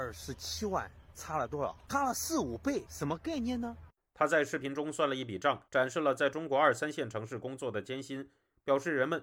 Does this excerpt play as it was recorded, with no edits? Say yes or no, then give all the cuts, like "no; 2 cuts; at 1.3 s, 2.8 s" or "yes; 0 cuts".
no; 1 cut; at 5.7 s